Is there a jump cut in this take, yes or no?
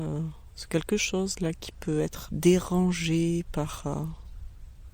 yes